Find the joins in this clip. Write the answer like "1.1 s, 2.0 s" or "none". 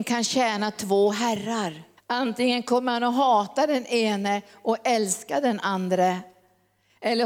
2.0 s